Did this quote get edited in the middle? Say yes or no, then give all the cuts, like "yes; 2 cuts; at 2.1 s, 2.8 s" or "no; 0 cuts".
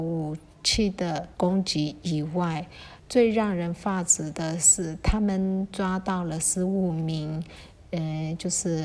yes; 2 cuts; at 1.3 s, 3.0 s